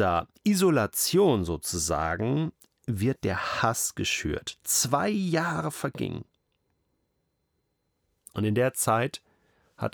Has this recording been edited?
no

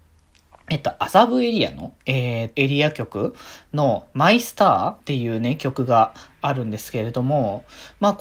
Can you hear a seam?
yes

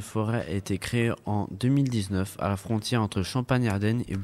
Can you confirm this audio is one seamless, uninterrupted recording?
yes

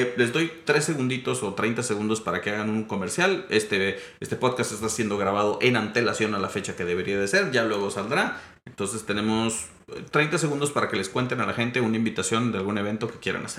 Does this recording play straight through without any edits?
yes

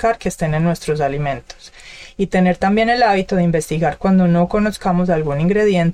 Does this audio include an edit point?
no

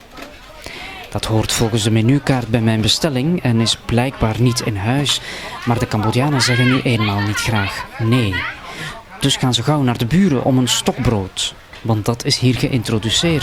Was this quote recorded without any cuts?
yes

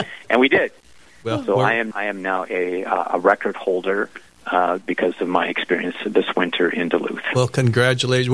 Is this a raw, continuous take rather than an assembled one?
no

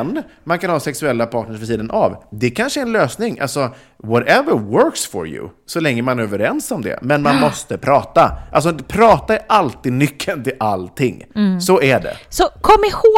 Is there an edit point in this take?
no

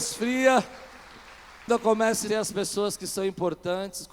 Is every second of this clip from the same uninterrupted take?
no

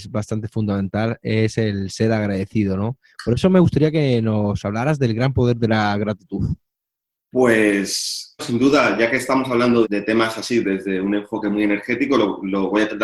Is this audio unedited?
no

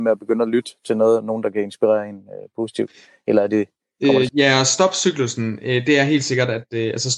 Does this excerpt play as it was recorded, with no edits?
no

